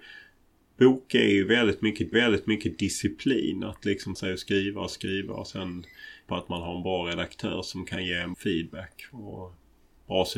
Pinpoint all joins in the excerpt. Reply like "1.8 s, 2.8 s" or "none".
2.1 s, 4.2 s, 4.9 s, 6.3 s, 8.3 s